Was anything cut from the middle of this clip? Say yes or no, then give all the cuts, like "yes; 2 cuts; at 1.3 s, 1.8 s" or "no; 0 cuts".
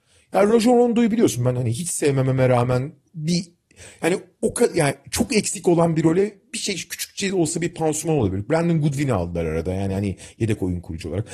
no; 0 cuts